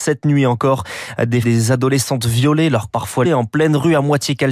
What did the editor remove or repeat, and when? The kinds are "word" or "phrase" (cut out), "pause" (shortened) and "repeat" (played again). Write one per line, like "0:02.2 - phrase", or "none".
0:01.4 - word
0:02.9 - word
0:03.2 - word